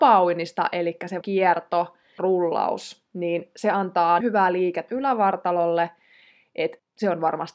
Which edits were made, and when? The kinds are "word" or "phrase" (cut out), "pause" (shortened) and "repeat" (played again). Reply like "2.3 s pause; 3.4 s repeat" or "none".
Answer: 1.2 s word; 2.2 s word; 4.2 s word; 4.9 s word